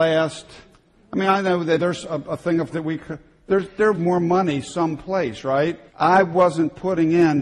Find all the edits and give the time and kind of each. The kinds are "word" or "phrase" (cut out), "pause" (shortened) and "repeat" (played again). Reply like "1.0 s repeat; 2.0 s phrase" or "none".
1.8 s word; 2.7 s word; 3.9 s word; 5.9 s pause